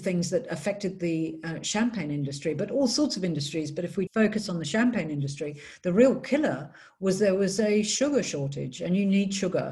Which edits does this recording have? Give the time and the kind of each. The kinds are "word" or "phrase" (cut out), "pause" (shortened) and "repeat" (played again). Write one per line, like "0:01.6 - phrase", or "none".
0:04.1 - word